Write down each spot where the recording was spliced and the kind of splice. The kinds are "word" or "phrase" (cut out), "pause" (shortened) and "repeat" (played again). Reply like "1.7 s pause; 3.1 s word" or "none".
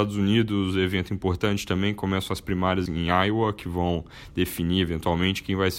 2.9 s word